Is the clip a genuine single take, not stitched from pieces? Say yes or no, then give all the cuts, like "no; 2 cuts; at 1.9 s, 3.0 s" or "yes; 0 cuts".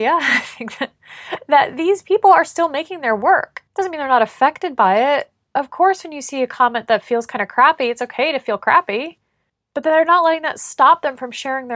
no; 2 cuts; at 3.7 s, 9.5 s